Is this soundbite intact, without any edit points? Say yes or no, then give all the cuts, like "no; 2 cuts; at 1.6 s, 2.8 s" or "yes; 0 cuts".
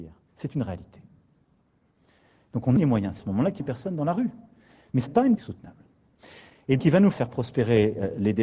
no; 7 cuts; at 2.8 s, 3.2 s, 3.6 s, 5.1 s, 5.4 s, 6.8 s, 7.1 s